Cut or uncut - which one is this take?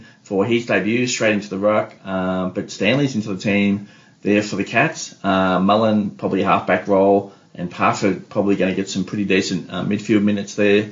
uncut